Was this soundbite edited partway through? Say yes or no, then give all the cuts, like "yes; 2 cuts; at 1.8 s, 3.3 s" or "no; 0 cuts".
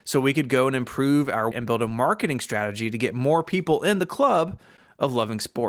yes; 1 cut; at 1.5 s